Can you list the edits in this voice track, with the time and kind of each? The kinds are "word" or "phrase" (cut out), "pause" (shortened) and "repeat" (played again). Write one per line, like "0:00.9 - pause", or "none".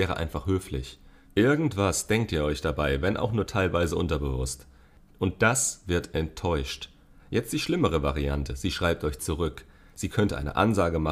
none